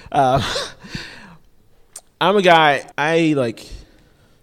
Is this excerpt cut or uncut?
cut